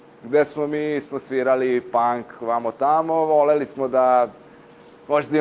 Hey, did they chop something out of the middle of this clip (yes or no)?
no